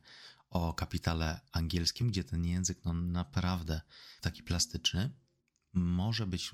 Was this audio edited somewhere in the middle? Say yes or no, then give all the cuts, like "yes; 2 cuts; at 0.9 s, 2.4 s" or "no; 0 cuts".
yes; 3 cuts; at 2.0 s, 4.2 s, 5.4 s